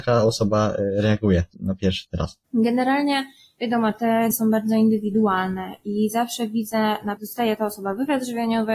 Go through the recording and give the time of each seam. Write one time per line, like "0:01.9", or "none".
0:01.5
0:02.0
0:02.4
0:04.3
0:07.2